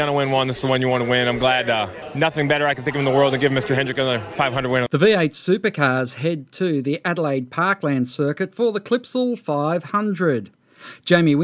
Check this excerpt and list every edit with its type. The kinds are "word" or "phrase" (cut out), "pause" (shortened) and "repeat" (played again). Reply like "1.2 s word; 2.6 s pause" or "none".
none